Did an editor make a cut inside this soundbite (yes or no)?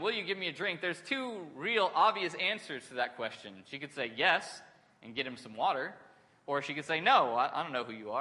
no